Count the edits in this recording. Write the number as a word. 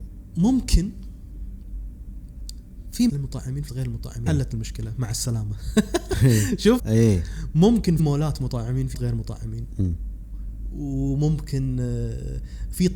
six